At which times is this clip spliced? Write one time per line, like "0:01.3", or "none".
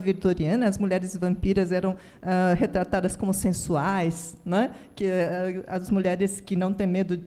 none